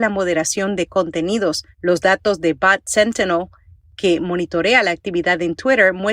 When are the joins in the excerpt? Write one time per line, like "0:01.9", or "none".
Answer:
0:01.7

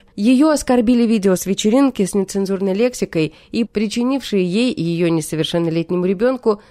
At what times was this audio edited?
0:03.7

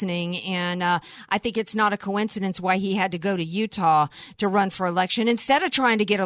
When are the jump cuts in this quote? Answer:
none

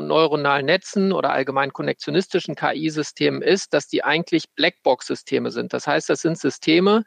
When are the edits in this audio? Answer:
none

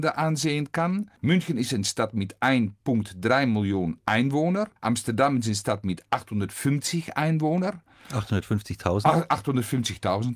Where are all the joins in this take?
0:01.2
0:04.8

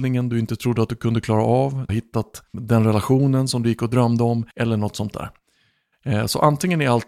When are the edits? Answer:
0:01.9
0:02.5
0:04.5

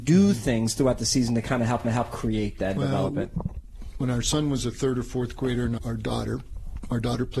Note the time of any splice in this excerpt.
0:01.8
0:05.8

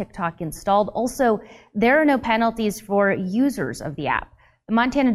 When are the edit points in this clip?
none

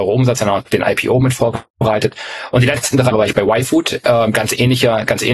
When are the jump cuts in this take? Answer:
0:03.1

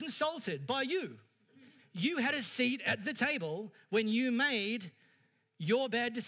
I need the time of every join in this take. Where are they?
0:01.8

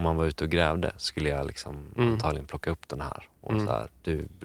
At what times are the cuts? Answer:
none

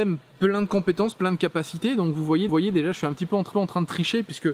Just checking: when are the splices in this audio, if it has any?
0:02.5
0:03.5

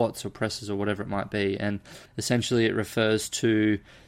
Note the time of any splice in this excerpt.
0:02.1

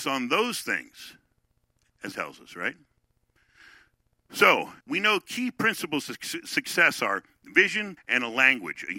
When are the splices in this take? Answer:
0:02.1
0:04.8
0:08.0

